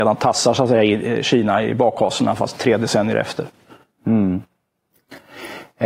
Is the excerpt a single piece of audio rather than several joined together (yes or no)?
yes